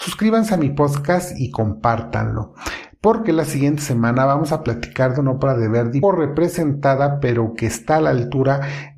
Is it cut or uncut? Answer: cut